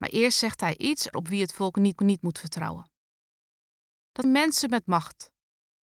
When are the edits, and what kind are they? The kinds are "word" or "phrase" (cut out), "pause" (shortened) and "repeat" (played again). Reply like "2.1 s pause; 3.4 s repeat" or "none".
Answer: 1.1 s word; 2.0 s repeat; 4.2 s word